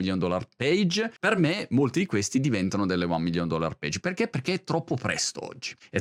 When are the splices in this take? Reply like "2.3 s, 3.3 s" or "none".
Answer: none

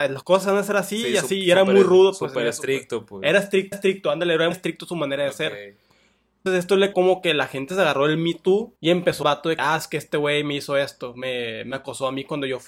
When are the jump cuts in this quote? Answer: 3.7 s, 4.5 s, 6.5 s, 6.9 s, 8.8 s, 9.2 s, 9.6 s

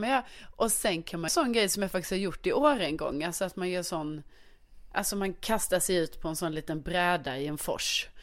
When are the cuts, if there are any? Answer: 1.3 s

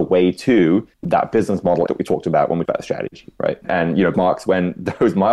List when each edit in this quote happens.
0.9 s, 1.9 s, 2.7 s, 3.6 s, 4.1 s

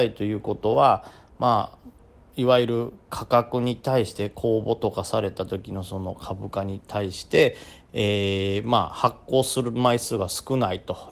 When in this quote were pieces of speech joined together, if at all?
1.8 s

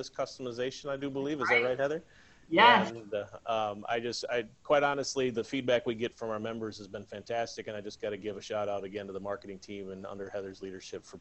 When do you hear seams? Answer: none

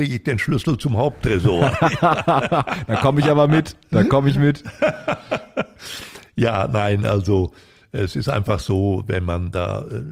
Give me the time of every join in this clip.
none

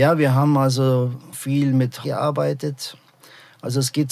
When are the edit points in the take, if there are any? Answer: 1.3 s, 2.0 s

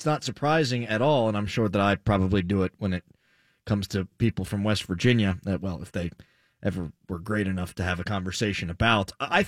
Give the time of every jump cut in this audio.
none

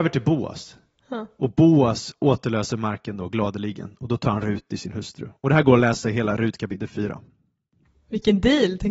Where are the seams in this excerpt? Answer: none

